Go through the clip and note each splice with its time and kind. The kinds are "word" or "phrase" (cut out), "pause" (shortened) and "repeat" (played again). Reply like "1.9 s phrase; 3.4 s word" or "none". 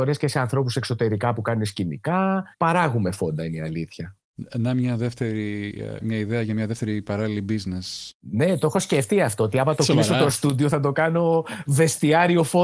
2.5 s pause; 6.0 s word; 8.2 s pause